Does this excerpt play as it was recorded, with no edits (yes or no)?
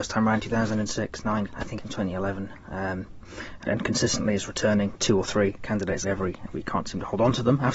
no